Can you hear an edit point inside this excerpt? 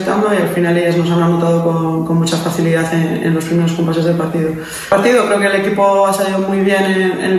no; 0 cuts

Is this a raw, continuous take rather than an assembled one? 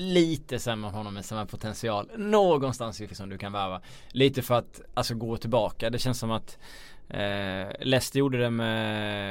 no; 1 cut; at 3.1 s

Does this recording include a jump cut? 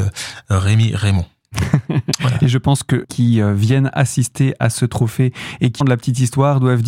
yes; 2 cuts; at 3.0 s, 5.8 s

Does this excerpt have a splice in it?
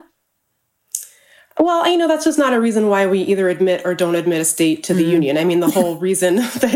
no; 0 cuts

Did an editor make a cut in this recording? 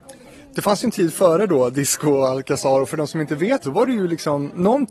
yes; 1 cut; at 3.6 s

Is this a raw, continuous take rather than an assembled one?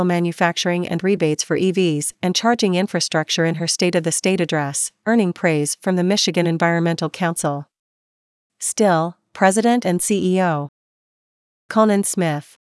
yes; 0 cuts

